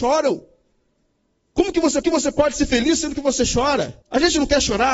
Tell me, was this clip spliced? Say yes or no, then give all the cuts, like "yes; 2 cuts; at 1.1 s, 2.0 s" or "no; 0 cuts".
yes; 2 cuts; at 2.0 s, 4.0 s